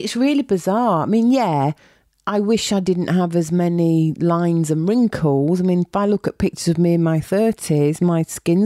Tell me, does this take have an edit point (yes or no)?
no